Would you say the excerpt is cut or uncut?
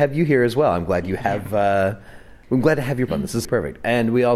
cut